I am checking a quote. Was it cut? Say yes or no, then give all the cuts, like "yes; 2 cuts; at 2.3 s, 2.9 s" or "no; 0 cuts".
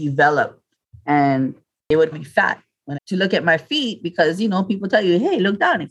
yes; 2 cuts; at 2.1 s, 3.0 s